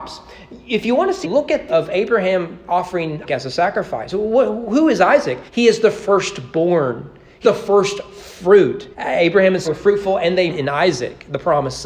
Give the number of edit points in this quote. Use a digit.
8